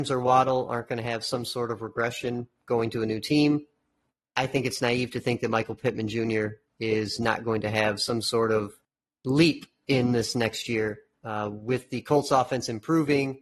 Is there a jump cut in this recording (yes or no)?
no